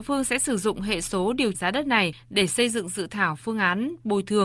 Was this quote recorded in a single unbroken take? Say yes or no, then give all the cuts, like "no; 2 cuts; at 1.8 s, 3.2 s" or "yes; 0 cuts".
no; 1 cut; at 1.5 s